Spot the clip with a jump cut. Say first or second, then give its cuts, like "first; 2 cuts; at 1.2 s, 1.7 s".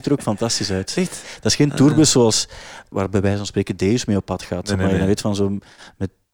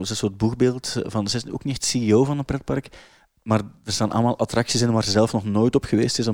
first; 1 cut; at 2.9 s